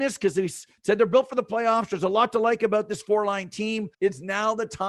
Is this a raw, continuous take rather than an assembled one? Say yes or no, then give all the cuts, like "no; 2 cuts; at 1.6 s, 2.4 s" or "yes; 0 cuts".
no; 1 cut; at 3.9 s